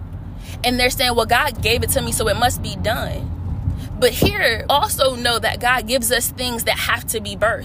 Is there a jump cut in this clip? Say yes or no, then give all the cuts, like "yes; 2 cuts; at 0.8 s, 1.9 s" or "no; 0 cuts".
yes; 2 cuts; at 1.5 s, 4.7 s